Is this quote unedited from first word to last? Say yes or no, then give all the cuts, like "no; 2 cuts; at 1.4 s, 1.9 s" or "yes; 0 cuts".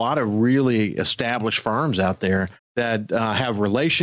no; 1 cut; at 2.6 s